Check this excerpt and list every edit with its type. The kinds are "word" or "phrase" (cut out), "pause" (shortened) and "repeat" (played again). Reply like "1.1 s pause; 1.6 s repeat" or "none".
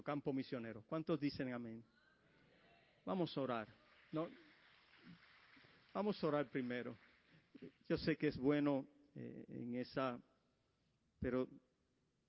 7.8 s pause